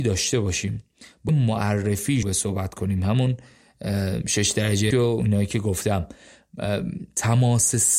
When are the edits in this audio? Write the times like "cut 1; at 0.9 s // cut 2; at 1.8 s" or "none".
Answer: cut 1; at 1.3 s // cut 2; at 2.2 s // cut 3; at 4.9 s